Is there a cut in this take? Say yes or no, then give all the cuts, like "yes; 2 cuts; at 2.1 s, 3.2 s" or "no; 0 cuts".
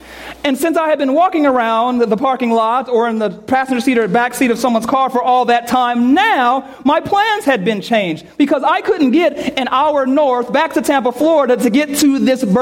no; 0 cuts